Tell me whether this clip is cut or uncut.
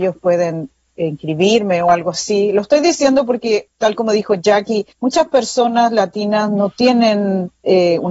cut